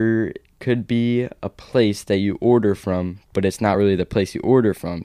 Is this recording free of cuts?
yes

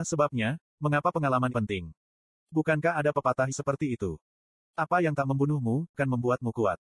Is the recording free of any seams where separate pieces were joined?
no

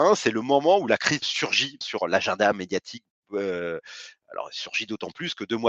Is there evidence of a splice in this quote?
yes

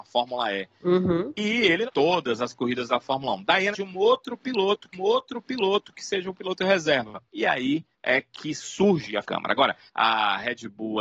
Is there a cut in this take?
yes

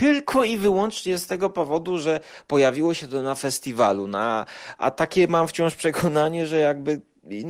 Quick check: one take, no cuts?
yes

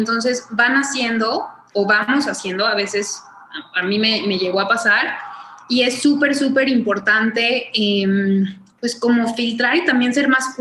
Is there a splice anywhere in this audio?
no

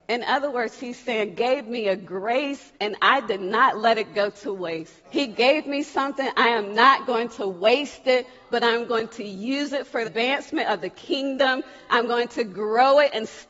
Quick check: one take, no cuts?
no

